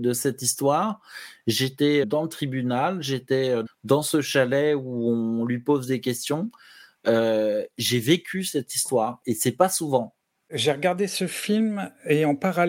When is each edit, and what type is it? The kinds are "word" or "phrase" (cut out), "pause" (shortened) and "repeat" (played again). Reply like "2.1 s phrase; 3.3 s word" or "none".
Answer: 2.0 s word; 3.7 s word